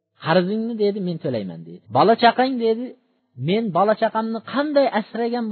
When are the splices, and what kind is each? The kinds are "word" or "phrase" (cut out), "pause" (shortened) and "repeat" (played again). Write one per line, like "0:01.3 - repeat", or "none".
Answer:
0:01.9 - pause